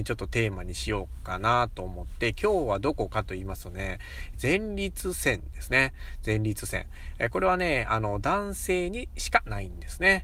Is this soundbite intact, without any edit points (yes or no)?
no